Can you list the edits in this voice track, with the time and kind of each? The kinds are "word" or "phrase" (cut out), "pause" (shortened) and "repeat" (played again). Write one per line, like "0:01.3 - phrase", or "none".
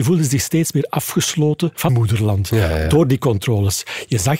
0:01.9 - word